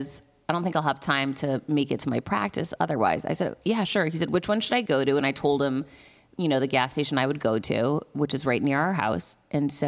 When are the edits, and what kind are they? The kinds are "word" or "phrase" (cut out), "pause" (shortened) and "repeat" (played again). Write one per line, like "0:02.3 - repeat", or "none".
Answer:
none